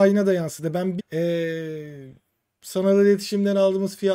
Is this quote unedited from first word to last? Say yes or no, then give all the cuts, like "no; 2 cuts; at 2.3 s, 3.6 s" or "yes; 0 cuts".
no; 1 cut; at 1.0 s